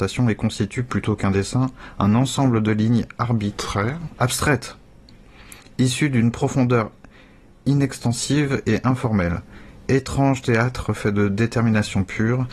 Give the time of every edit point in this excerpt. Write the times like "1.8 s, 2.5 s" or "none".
none